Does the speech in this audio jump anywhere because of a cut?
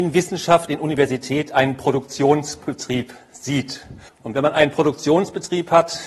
yes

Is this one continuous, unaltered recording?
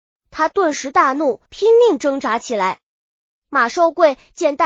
no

